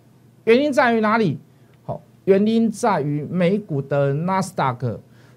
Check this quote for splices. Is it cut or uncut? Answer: uncut